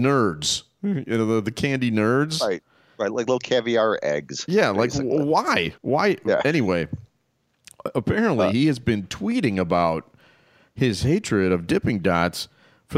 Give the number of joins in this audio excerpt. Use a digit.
1